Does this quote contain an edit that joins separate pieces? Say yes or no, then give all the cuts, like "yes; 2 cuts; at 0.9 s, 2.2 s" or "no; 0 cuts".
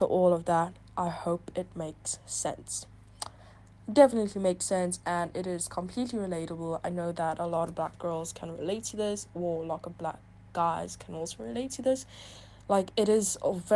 no; 0 cuts